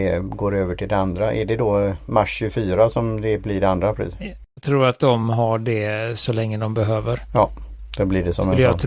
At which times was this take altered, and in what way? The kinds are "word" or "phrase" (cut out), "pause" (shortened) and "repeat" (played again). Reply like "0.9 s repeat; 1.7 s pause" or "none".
none